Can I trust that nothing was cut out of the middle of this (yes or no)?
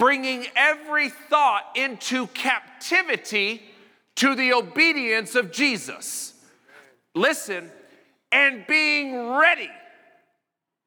yes